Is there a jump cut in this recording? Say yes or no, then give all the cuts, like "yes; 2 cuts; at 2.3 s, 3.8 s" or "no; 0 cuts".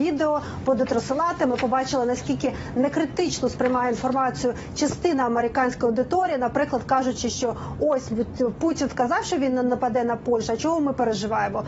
no; 0 cuts